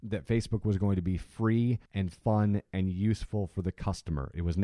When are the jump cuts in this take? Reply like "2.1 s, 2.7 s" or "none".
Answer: 1.8 s